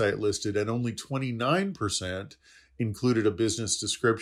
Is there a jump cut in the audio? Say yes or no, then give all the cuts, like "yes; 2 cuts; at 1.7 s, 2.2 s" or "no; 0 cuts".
no; 0 cuts